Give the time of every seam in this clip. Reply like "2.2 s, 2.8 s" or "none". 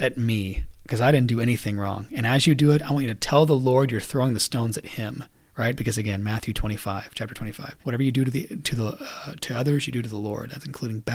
7.8 s